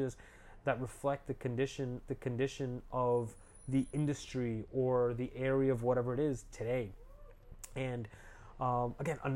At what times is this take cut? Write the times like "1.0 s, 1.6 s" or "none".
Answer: 2.1 s